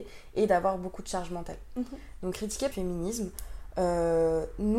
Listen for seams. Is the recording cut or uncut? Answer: cut